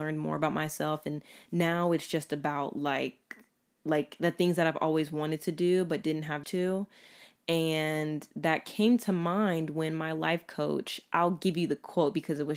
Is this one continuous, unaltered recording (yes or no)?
no